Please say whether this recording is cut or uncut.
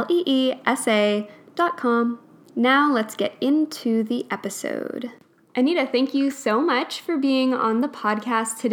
uncut